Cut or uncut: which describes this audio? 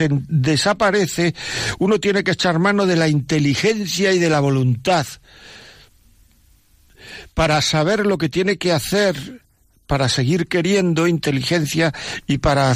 uncut